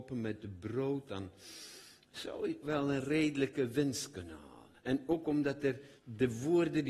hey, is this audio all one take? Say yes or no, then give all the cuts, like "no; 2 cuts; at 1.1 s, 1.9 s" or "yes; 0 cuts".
no; 3 cuts; at 2.6 s, 4.8 s, 6.0 s